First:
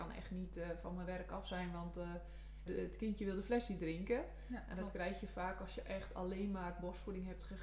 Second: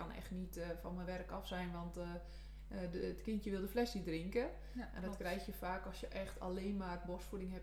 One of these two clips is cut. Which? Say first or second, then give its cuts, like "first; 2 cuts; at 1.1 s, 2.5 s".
first; 1 cut; at 2.7 s